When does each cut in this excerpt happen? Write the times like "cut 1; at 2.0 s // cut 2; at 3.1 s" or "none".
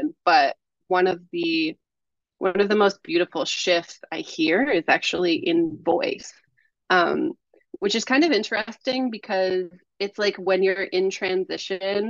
none